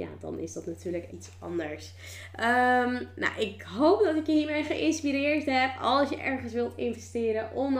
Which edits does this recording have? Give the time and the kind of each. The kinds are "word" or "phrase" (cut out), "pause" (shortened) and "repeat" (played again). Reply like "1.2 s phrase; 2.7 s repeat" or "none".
1.1 s word